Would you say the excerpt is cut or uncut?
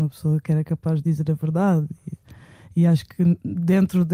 uncut